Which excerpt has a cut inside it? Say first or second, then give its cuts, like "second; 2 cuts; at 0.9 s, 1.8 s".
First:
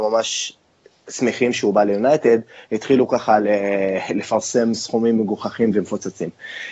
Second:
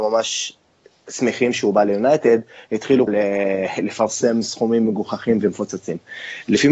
second; 1 cut; at 3.1 s